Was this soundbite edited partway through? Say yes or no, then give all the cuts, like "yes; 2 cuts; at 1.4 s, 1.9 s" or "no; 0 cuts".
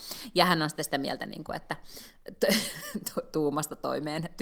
no; 0 cuts